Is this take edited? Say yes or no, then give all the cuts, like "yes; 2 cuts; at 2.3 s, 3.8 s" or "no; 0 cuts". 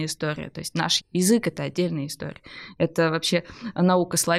yes; 1 cut; at 1.0 s